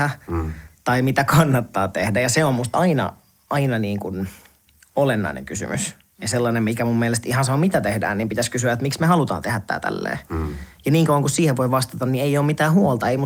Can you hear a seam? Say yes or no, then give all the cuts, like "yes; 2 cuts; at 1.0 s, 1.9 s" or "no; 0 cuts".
no; 0 cuts